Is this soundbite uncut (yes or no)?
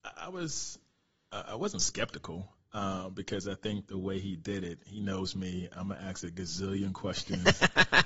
yes